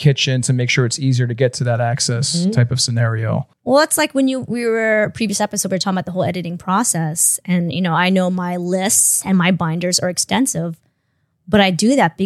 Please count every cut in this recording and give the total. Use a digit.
0